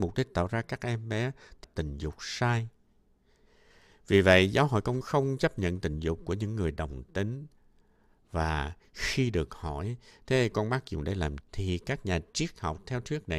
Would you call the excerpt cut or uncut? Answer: cut